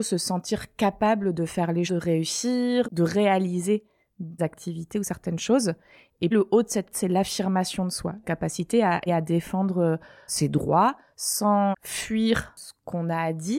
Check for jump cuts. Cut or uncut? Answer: cut